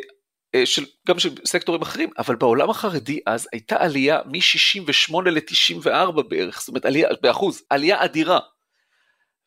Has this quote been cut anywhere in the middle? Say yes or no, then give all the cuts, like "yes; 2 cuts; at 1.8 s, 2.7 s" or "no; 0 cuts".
yes; 1 cut; at 7.7 s